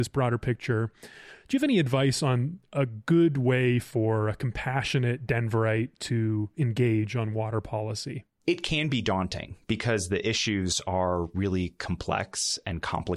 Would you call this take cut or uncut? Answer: cut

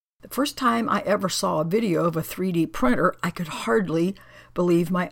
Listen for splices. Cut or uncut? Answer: uncut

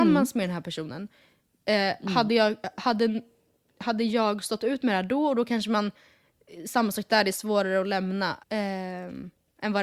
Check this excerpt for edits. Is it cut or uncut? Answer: cut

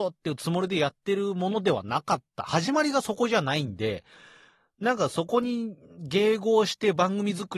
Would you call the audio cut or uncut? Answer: uncut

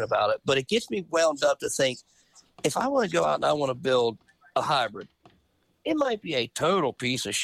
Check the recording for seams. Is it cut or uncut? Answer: uncut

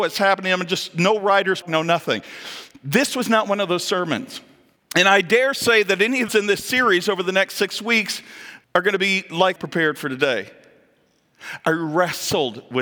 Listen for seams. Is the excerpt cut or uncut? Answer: cut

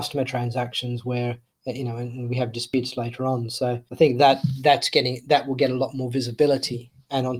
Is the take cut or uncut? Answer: uncut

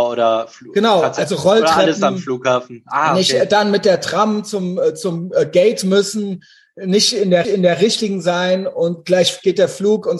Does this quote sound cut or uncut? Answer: cut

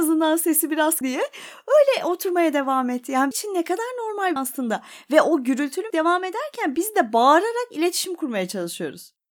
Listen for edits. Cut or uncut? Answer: cut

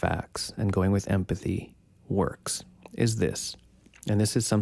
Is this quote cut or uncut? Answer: uncut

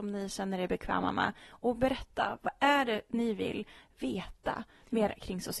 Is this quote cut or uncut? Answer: uncut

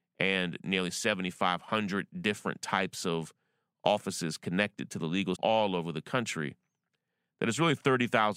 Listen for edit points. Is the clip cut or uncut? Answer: cut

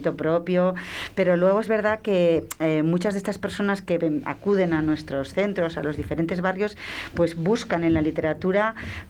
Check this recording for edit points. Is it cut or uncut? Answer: uncut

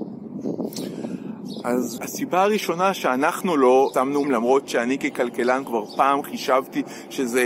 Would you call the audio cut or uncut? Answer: cut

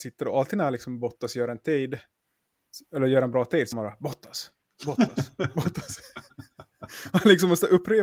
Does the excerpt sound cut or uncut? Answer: cut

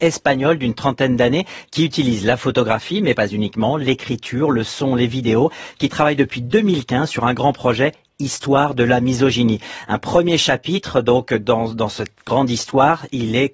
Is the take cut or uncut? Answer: uncut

